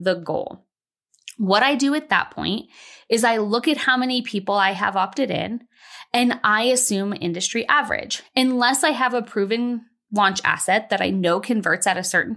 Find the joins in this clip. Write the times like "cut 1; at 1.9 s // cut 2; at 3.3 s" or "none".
none